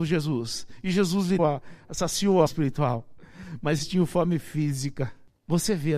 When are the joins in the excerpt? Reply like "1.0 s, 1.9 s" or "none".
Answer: 1.4 s, 2.5 s, 3.8 s